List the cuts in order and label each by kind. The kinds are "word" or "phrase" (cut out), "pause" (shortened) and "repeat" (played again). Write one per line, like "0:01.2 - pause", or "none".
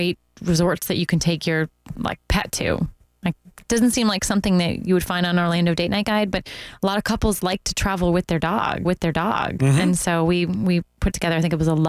0:08.8 - repeat